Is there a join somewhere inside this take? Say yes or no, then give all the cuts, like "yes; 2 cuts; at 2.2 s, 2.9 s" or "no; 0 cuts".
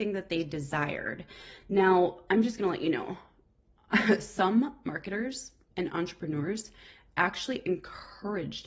no; 0 cuts